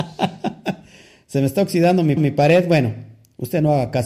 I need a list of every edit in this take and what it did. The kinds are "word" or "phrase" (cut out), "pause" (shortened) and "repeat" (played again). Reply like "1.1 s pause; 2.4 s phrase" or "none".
2.2 s repeat

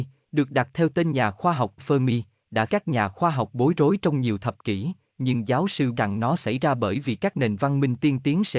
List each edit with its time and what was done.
1.8 s word; 2.7 s word; 5.9 s phrase

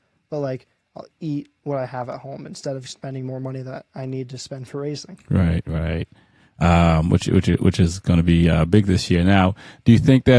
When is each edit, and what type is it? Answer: none

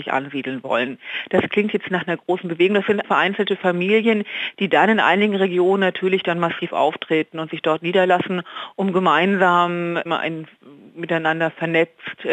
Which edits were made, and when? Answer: 3.0 s word; 10.1 s word

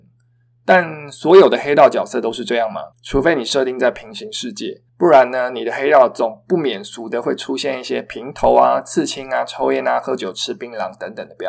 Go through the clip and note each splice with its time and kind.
2.9 s pause; 4.9 s pause

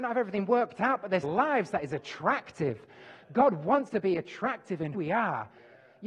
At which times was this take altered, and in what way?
1.2 s phrase; 3.9 s word; 4.9 s word

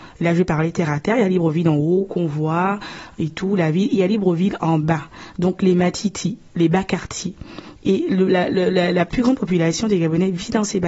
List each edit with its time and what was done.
none

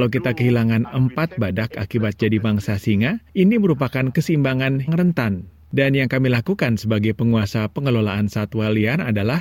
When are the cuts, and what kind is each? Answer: 4.9 s word

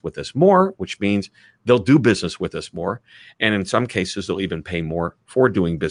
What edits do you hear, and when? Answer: none

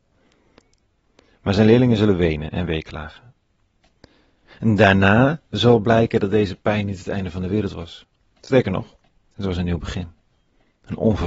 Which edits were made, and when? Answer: none

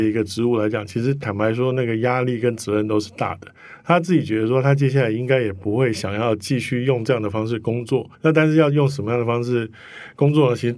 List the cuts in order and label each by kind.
8.1 s pause

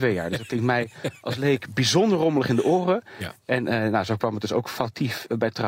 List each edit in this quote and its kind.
none

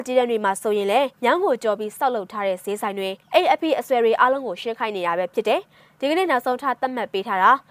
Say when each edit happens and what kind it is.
1.1 s pause; 3.2 s pause

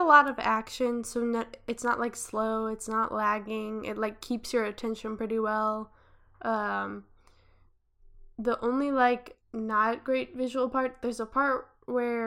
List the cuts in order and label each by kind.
none

